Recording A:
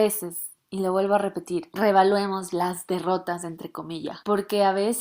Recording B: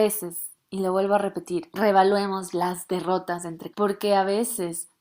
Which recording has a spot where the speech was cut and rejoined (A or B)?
B